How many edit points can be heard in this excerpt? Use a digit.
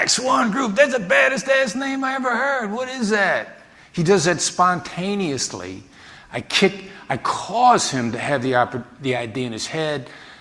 0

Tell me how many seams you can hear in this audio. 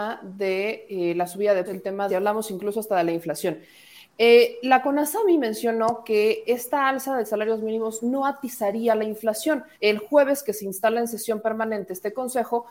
3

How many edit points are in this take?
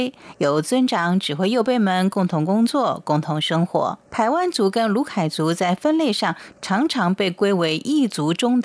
1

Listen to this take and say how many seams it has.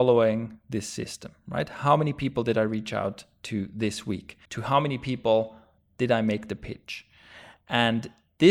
1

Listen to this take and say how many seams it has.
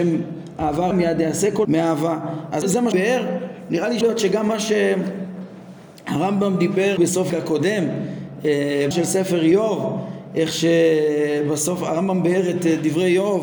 8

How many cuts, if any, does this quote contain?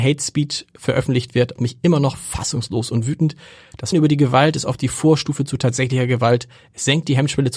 2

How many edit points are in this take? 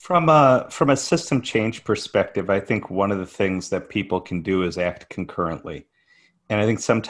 0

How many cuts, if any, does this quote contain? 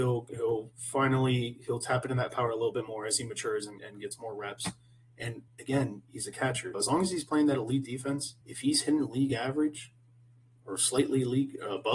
4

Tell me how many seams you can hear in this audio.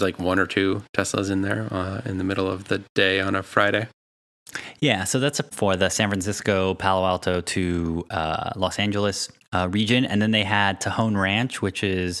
2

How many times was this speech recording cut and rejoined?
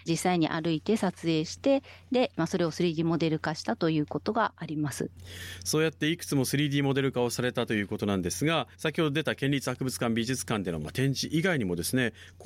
1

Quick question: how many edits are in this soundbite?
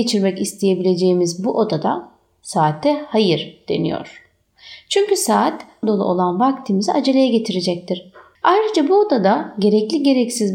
1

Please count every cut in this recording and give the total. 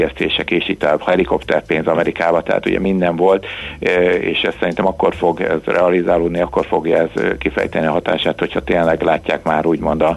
0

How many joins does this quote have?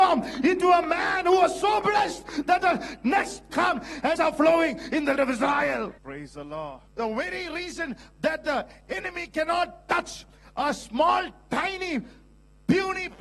6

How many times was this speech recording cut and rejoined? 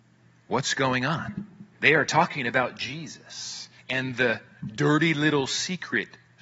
2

